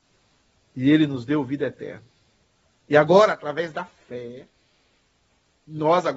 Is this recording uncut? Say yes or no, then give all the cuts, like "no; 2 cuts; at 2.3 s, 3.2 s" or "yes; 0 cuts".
yes; 0 cuts